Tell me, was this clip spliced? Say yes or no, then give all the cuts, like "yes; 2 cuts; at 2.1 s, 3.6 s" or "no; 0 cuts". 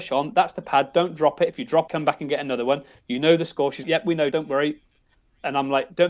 yes; 3 cuts; at 1.9 s, 3.8 s, 4.3 s